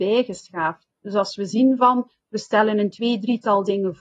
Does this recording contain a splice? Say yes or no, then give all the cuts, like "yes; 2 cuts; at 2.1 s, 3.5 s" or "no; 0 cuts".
yes; 1 cut; at 0.9 s